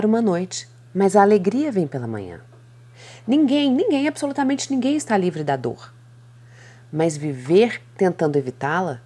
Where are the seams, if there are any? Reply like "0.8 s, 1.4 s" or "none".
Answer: none

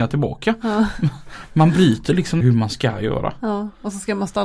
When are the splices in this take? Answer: 2.4 s

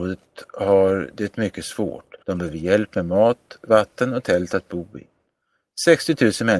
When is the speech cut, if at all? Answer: 2.2 s

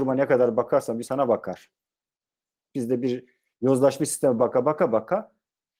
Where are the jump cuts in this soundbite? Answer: 1.0 s, 4.4 s

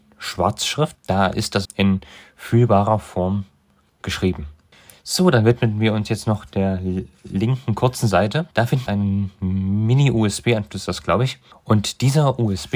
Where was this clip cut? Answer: 0.9 s, 1.6 s, 8.5 s, 8.9 s

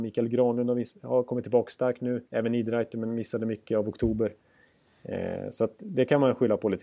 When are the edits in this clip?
2.3 s

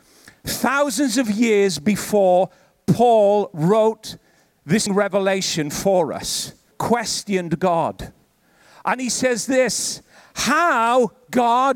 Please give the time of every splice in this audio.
4.9 s, 6.7 s

